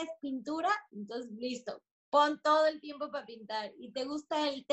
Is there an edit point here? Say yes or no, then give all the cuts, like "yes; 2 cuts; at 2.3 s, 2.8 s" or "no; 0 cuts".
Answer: no; 0 cuts